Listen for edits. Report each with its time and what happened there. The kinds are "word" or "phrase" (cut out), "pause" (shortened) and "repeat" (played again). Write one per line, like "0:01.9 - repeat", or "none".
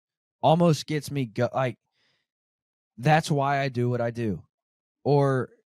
none